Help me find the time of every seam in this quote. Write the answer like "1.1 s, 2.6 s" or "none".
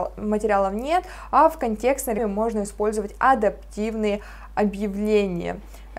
2.2 s